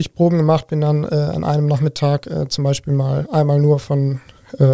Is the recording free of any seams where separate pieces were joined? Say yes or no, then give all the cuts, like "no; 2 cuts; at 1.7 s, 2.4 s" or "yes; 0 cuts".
yes; 0 cuts